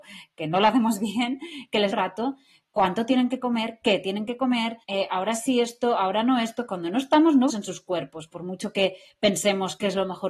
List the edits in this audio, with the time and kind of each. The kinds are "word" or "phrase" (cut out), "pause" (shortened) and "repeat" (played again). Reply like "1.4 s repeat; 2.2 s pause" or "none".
1.9 s phrase; 4.8 s pause; 7.5 s word